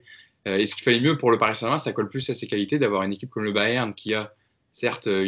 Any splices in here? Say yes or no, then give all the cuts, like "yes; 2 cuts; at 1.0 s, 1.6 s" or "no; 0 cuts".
no; 0 cuts